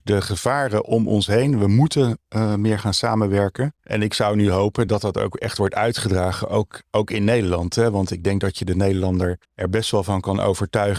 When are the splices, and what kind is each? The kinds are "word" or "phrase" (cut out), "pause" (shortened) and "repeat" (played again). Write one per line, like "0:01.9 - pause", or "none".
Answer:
0:03.8 - pause
0:04.9 - word
0:09.4 - pause